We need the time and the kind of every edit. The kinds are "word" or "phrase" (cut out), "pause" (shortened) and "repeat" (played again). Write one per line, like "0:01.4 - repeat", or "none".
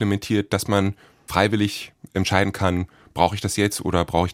0:01.3 - word